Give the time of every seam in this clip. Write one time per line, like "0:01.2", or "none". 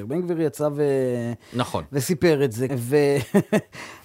0:02.7